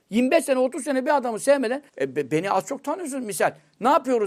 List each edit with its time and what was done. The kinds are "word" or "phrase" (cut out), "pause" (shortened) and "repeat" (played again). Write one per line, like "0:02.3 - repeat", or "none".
0:01.9 - pause